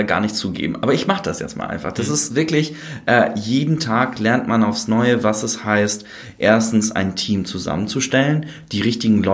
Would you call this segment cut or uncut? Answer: uncut